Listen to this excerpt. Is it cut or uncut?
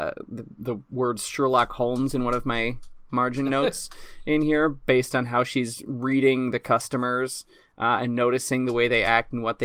uncut